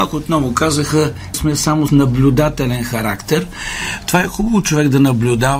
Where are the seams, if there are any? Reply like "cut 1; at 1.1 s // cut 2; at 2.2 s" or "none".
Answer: cut 1; at 1.3 s // cut 2; at 1.9 s